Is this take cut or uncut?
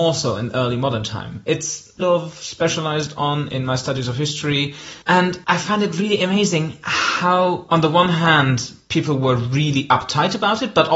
cut